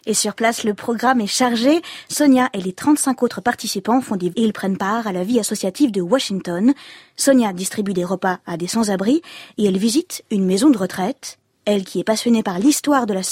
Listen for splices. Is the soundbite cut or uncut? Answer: cut